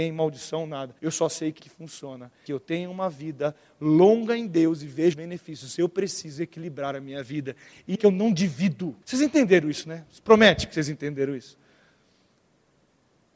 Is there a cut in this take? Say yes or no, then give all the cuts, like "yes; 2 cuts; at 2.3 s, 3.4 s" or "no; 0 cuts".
yes; 6 cuts; at 1.0 s, 1.6 s, 2.5 s, 5.1 s, 7.9 s, 9.0 s